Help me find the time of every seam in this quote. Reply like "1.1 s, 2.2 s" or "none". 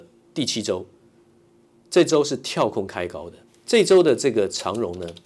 3.5 s